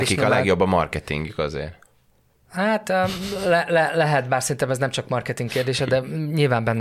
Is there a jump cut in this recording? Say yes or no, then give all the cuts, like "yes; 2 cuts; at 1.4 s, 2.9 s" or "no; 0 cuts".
no; 0 cuts